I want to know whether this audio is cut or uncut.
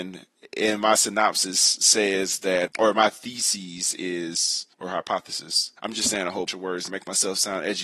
cut